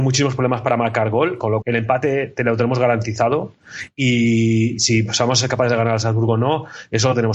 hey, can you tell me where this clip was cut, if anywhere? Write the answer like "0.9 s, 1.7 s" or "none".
1.6 s